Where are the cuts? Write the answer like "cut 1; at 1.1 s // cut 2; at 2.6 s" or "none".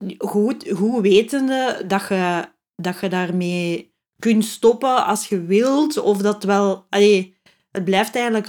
none